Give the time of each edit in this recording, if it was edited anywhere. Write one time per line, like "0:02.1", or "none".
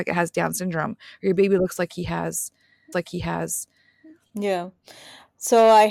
0:02.9